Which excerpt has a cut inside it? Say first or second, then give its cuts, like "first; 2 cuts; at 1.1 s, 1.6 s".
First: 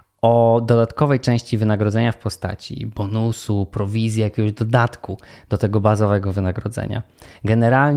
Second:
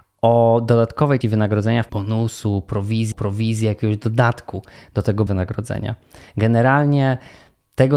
second; 4 cuts; at 1.2 s, 1.9 s, 3.1 s, 5.3 s